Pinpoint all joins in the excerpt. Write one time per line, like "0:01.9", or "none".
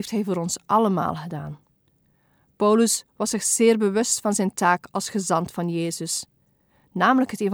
none